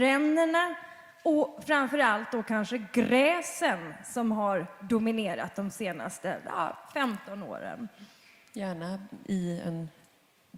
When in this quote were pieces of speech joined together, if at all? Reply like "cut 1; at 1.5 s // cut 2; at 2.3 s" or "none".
none